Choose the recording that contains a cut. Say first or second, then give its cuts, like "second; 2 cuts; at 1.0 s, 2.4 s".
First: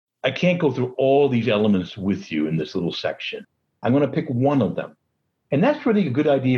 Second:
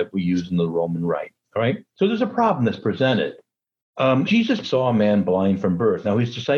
second; 3 cuts; at 1.9 s, 4.3 s, 4.6 s